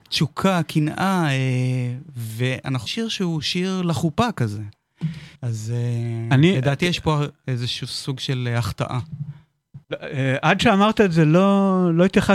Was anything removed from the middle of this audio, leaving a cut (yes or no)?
yes